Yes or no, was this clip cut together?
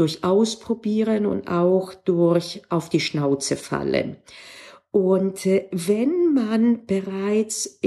no